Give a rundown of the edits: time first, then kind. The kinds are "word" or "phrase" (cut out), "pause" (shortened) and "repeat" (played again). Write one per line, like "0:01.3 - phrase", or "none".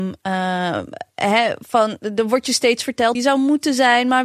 0:03.1 - word